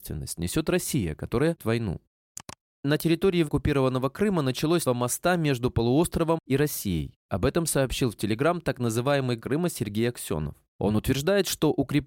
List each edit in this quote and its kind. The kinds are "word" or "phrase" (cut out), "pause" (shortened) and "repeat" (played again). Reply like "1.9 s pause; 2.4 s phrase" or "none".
1.6 s word; 3.4 s word; 4.8 s word; 9.4 s word